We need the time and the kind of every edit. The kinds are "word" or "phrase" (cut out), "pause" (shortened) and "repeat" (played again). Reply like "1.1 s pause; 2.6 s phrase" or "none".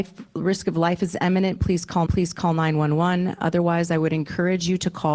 2.1 s repeat